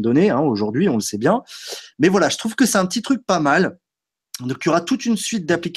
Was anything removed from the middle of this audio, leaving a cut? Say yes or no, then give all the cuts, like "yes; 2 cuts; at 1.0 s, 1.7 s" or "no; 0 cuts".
no; 0 cuts